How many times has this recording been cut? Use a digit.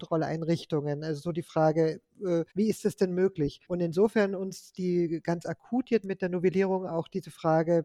3